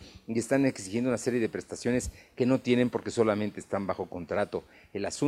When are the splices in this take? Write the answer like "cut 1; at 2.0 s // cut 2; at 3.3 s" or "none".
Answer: none